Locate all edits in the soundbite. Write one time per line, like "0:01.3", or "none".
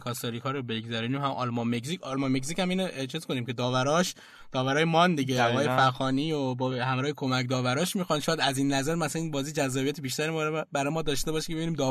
none

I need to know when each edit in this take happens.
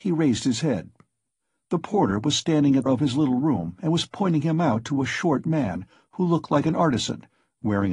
0:02.9

